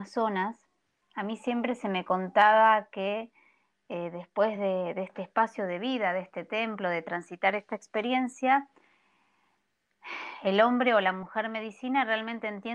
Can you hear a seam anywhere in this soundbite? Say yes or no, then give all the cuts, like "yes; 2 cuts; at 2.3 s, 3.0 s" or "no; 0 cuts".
no; 0 cuts